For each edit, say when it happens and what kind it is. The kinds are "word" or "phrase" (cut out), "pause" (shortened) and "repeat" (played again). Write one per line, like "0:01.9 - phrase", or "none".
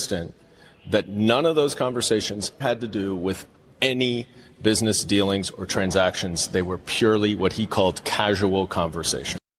0:02.6 - word

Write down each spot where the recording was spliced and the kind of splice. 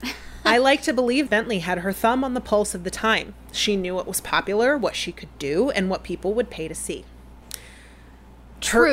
0:01.3 - phrase
0:07.4 - pause

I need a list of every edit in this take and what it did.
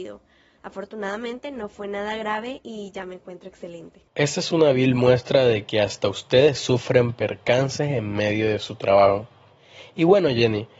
0:04.1 - pause

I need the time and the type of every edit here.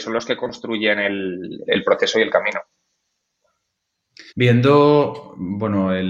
0:01.7 - word
0:04.3 - pause

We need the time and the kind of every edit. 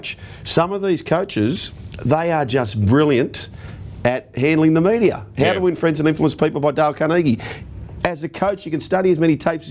none

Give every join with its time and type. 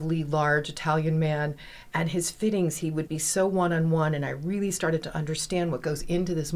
0:03.1 - word

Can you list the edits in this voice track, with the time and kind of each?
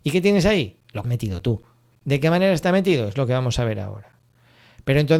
0:01.0 - word
0:01.9 - pause

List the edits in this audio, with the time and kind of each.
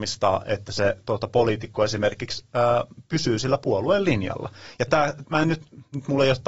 0:05.2 - word

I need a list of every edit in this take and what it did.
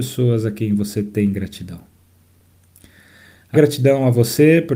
0:03.5 - word

